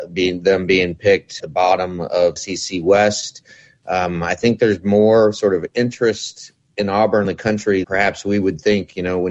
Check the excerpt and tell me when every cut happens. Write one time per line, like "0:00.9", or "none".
0:01.4
0:02.4
0:07.2
0:07.8